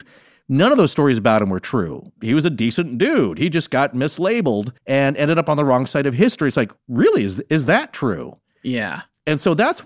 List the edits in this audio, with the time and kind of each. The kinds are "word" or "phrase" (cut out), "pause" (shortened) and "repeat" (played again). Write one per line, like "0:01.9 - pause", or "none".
0:04.8 - pause